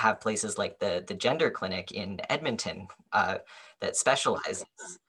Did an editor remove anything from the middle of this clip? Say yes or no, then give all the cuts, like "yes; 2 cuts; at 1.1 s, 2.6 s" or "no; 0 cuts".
no; 0 cuts